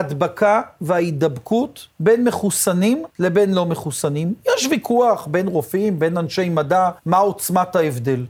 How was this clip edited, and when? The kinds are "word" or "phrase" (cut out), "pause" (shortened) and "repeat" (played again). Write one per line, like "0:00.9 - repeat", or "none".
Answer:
0:01.9 - pause
0:03.1 - pause
0:07.0 - pause